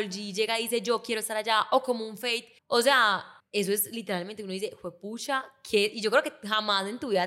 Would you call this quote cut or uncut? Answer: cut